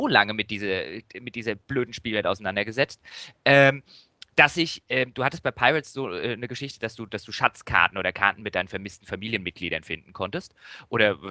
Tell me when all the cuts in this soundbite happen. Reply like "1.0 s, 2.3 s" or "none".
none